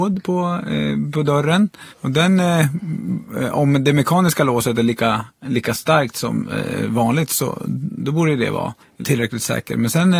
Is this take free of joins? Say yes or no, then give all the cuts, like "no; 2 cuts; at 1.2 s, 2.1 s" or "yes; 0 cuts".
no; 2 cuts; at 1.9 s, 8.8 s